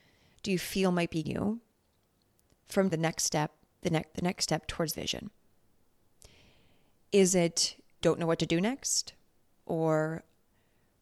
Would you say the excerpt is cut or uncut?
cut